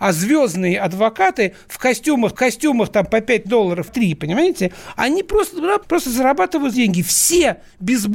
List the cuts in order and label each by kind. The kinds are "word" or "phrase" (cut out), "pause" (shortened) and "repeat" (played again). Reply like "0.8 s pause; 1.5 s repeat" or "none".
2.3 s repeat; 3.4 s word; 3.9 s phrase; 5.8 s word; 6.7 s word